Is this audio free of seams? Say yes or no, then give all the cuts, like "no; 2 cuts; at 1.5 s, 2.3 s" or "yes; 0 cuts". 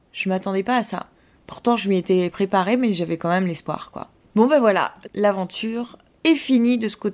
yes; 0 cuts